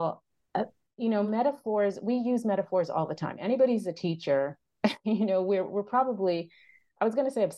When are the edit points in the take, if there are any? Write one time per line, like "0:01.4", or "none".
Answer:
none

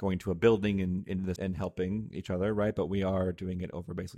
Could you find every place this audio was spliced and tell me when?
0:01.4

